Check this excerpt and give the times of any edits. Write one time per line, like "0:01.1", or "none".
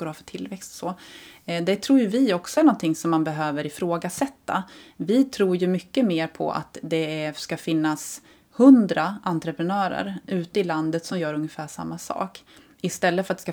none